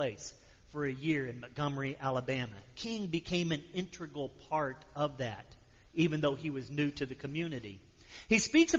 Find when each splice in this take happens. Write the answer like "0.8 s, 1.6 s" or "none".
none